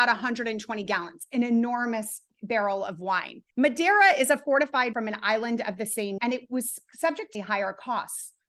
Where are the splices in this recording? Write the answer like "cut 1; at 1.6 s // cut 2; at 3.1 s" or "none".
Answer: cut 1; at 2.3 s // cut 2; at 3.5 s // cut 3; at 4.9 s // cut 4; at 6.2 s // cut 5; at 7.3 s